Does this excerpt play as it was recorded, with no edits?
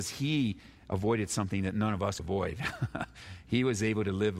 no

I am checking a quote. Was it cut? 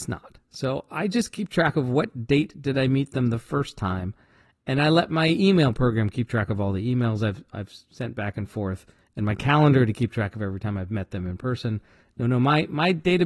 no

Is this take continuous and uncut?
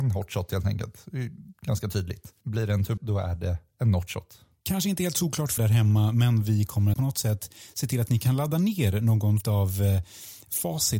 no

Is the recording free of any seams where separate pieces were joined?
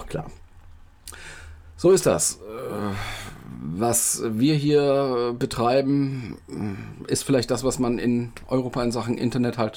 yes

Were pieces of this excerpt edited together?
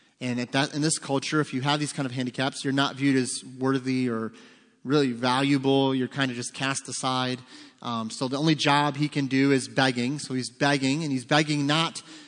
no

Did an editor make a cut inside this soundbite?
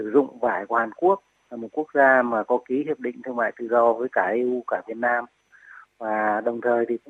no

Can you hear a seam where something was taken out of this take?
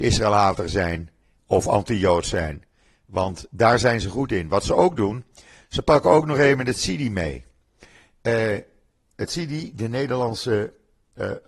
no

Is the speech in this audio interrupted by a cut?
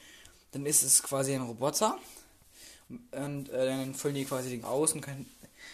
yes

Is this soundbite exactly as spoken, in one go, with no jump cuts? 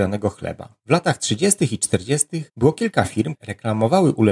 no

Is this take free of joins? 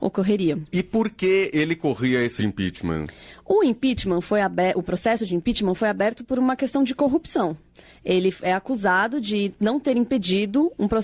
no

